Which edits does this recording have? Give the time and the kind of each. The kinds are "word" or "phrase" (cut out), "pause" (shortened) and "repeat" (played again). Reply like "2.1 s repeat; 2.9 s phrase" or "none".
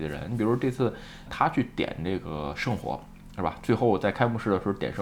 1.3 s word